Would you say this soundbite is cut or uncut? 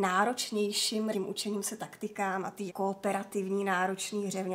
cut